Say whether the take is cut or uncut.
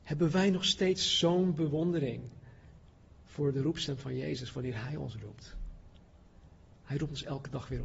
uncut